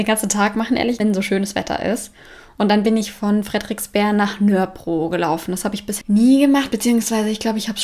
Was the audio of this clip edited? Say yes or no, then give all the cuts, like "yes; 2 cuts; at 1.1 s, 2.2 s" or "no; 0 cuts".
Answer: yes; 2 cuts; at 1.0 s, 6.0 s